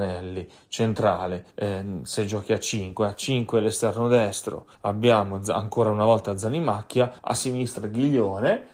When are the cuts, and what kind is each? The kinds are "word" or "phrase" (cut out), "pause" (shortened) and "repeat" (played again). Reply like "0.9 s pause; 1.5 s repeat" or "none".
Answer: 1.5 s pause; 4.7 s pause; 7.2 s pause